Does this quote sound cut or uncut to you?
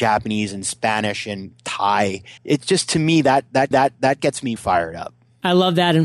cut